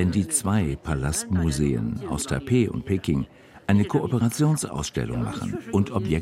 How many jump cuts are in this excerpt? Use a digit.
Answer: 0